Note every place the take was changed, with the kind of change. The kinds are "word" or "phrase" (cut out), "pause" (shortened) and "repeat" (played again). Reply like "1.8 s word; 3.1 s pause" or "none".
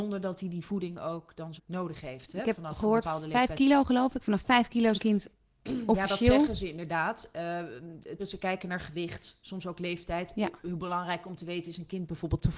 1.6 s word; 4.9 s word; 8.2 s word

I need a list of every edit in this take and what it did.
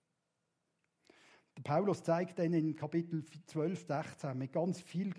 3.9 s word

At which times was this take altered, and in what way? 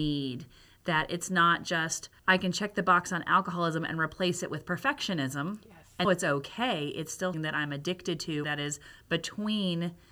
2.2 s pause; 6.0 s word; 7.3 s word; 8.4 s phrase

